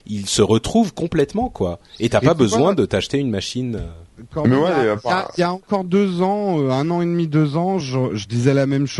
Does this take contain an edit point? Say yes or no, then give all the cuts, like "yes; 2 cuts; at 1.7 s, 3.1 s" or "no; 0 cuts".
no; 0 cuts